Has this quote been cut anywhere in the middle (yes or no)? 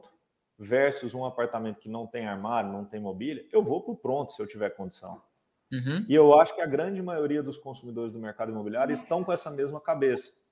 no